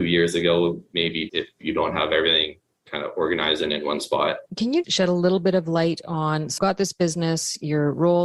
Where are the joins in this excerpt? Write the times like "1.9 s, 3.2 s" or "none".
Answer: 1.3 s, 4.5 s, 4.8 s, 6.6 s